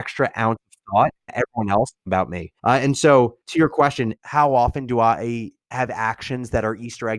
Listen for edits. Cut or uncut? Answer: cut